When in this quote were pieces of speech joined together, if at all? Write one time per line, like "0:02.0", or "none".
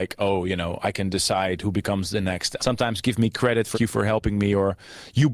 0:02.6
0:03.7